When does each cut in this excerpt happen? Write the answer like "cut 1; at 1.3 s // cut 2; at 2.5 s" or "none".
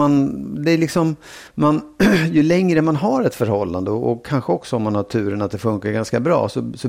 cut 1; at 1.5 s